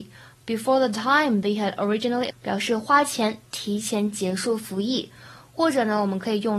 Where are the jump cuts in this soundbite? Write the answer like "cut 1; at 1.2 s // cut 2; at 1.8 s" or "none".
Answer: cut 1; at 1.4 s // cut 2; at 2.3 s